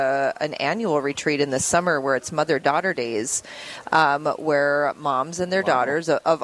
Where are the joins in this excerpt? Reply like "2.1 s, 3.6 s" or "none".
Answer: none